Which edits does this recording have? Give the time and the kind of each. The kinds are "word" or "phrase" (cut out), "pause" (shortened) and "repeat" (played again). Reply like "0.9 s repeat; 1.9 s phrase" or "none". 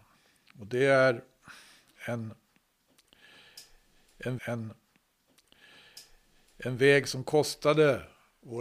4.4 s repeat

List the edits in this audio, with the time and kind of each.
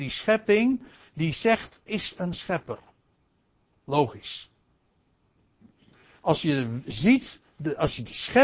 1.9 s word

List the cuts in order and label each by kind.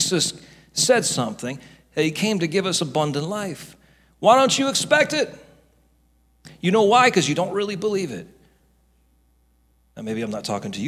none

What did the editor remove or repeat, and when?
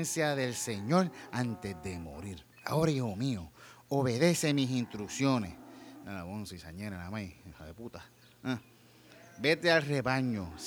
2.5 s pause

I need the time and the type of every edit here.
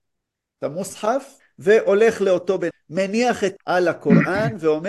1.4 s pause; 2.7 s word; 3.6 s word

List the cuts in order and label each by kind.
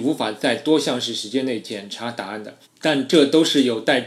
2.6 s pause

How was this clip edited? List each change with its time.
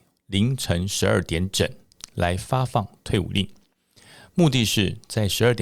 none

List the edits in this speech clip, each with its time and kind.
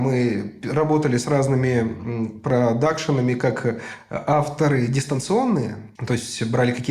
6.0 s pause

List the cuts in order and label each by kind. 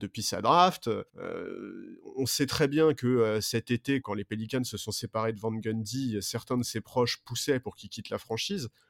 1.1 s pause; 4.0 s word

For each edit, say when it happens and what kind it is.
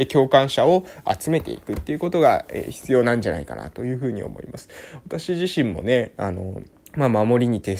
6.7 s pause

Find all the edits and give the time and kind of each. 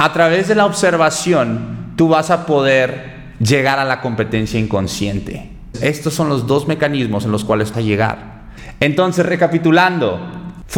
7.7 s phrase

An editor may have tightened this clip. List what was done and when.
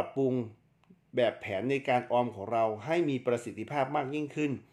none

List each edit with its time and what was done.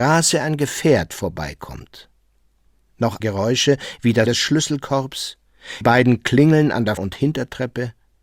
3.2 s word; 4.3 s word; 5.8 s word; 7.0 s word

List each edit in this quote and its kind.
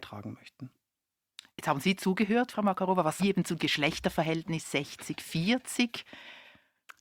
1.5 s pause; 3.2 s phrase; 3.6 s word

